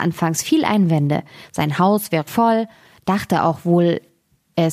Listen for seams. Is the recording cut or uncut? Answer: cut